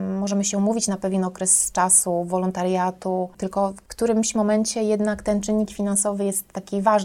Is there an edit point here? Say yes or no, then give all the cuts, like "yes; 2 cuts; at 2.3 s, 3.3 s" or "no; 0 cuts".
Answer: no; 0 cuts